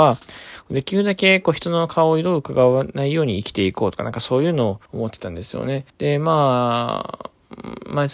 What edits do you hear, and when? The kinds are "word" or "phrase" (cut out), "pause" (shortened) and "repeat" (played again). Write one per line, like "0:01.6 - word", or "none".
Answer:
0:04.9 - pause
0:05.9 - pause